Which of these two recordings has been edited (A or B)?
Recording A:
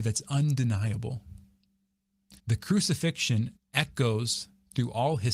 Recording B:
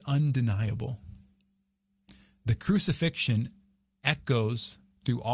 A